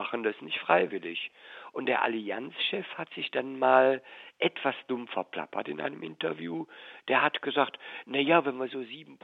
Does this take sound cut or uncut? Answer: uncut